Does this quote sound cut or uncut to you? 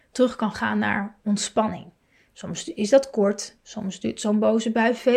uncut